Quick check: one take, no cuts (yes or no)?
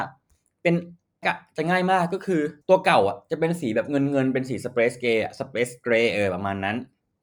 no